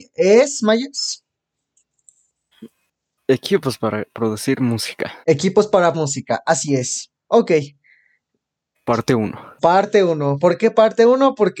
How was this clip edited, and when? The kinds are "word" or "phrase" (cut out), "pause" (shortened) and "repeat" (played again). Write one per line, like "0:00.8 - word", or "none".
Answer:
0:05.2 - pause
0:05.9 - word